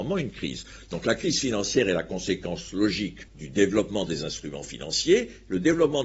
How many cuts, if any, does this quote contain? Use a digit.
1